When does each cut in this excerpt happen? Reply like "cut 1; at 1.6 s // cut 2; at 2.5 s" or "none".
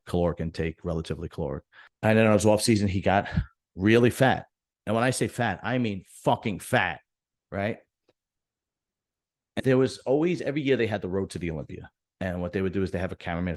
cut 1; at 9.6 s